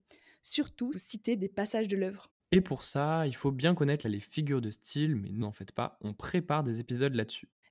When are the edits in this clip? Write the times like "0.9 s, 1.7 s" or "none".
0.9 s, 4.0 s, 5.4 s